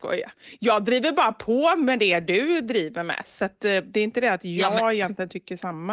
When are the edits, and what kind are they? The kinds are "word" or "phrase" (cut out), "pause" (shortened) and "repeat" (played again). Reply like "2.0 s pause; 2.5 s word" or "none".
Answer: none